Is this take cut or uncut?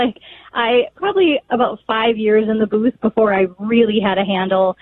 uncut